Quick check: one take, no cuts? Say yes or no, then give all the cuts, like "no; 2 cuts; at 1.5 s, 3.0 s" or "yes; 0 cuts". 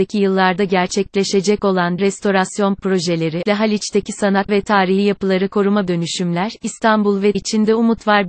no; 5 cuts; at 2.0 s, 3.5 s, 4.5 s, 5.9 s, 7.3 s